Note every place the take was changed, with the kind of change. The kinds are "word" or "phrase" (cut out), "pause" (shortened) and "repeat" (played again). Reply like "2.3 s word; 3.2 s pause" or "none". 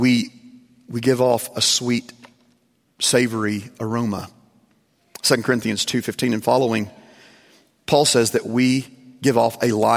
none